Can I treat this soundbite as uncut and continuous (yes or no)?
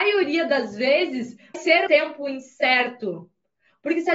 no